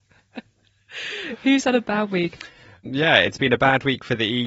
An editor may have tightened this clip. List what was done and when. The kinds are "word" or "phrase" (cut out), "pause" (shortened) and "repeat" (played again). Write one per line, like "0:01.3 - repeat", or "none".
none